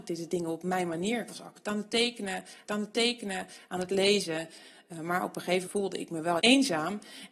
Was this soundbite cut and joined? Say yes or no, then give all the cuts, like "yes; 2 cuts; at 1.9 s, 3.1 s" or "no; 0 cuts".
yes; 3 cuts; at 2.7 s, 5.7 s, 6.4 s